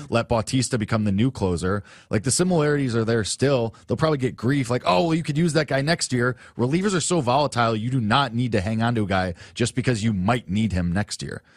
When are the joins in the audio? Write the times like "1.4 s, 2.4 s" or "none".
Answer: none